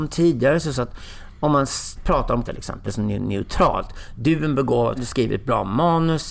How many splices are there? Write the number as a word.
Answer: four